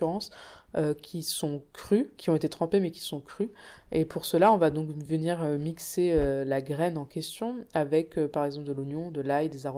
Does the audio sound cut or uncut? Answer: uncut